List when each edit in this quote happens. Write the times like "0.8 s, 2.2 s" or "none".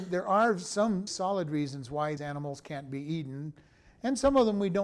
1.1 s, 2.2 s